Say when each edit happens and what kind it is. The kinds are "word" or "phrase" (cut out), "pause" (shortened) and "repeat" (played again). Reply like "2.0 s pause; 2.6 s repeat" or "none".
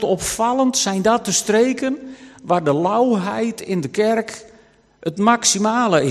none